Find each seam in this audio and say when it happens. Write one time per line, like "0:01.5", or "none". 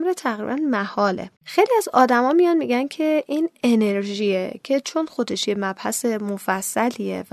0:01.3